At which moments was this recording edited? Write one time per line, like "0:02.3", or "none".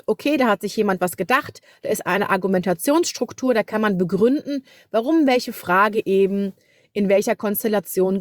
none